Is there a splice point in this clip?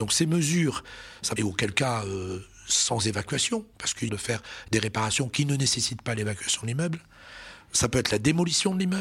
yes; 3 cuts; at 1.4 s, 3.7 s, 4.1 s

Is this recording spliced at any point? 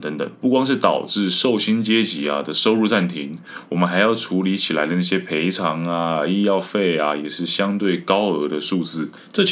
no; 0 cuts

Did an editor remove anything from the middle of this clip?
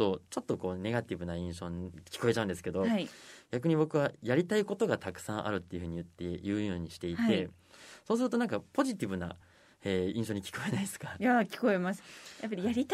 no; 0 cuts

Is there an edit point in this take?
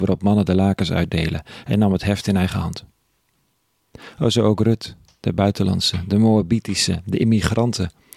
no; 0 cuts

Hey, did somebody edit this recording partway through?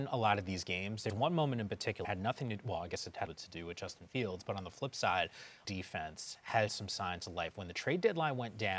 yes; 5 cuts; at 1.1 s, 2.0 s, 3.3 s, 5.6 s, 6.7 s

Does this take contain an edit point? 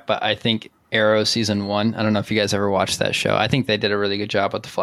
no; 0 cuts

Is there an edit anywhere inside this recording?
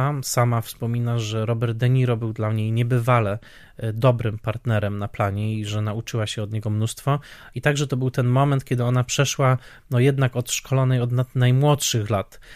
no; 0 cuts

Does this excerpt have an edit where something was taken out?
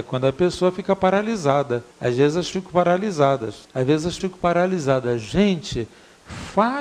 yes; 4 cuts; at 1.9 s, 2.5 s, 3.6 s, 4.2 s

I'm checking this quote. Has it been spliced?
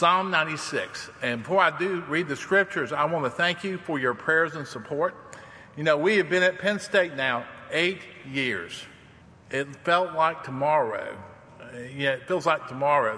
yes; 1 cut; at 9.2 s

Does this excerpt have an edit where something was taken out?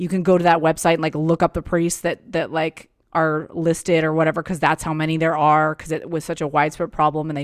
no; 0 cuts

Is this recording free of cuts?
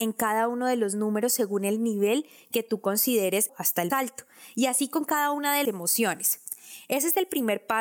no; 3 cuts; at 3.5 s, 3.9 s, 5.6 s

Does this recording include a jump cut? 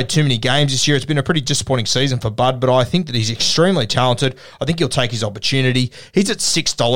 no; 0 cuts

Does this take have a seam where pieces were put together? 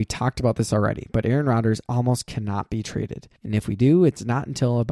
yes; 1 cut; at 3.4 s

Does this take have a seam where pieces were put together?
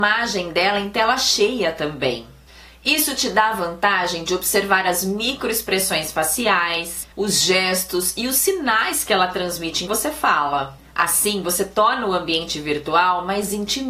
yes; 2 cuts; at 7.1 s, 9.9 s

